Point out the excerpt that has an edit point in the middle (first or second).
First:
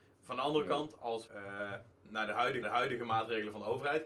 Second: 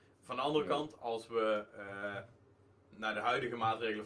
first